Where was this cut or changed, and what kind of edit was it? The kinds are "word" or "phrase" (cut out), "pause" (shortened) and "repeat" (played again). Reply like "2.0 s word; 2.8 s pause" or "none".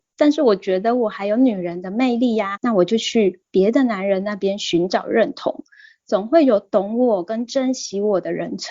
2.6 s word